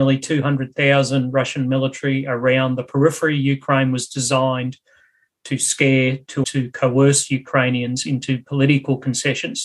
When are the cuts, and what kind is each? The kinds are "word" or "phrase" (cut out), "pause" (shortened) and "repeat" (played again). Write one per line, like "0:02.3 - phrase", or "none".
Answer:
0:06.4 - phrase